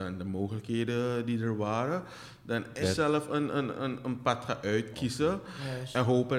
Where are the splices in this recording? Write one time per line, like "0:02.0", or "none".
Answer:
0:02.8